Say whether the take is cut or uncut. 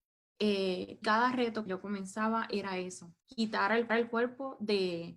cut